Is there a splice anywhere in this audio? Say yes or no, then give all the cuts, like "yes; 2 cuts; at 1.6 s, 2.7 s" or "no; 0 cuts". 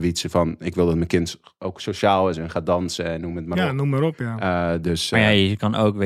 no; 0 cuts